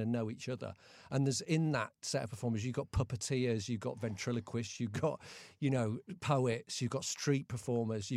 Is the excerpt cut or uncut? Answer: uncut